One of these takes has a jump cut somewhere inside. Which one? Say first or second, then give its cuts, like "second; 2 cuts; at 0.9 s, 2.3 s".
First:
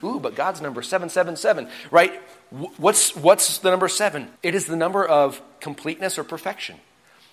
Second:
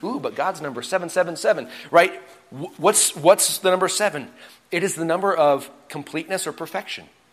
first; 1 cut; at 4.4 s